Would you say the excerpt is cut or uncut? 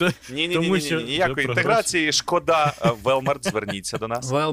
uncut